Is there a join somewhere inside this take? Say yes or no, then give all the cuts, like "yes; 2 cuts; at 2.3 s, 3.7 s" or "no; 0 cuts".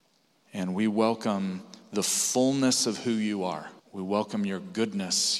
yes; 1 cut; at 3.8 s